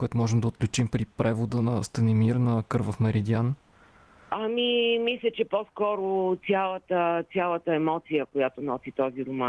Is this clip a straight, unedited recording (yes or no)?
yes